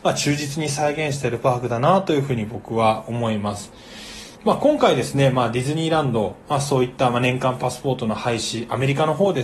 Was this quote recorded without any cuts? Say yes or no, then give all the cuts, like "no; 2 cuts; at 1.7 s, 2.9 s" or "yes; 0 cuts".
no; 1 cut; at 4.4 s